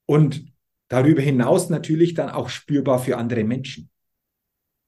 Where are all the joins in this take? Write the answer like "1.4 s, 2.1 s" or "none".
none